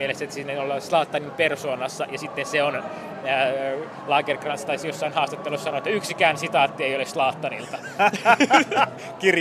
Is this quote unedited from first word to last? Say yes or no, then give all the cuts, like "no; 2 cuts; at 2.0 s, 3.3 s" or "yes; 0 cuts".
yes; 0 cuts